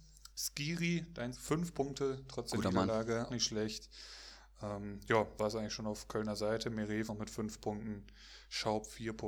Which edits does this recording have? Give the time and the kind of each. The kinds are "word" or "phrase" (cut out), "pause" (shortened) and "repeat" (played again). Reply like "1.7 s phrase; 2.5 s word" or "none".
1.3 s word; 3.3 s word; 5.4 s word; 7.1 s word